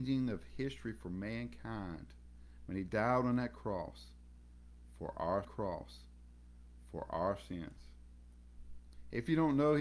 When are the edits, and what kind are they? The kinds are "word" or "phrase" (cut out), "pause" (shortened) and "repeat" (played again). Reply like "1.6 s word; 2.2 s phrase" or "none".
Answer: 5.4 s repeat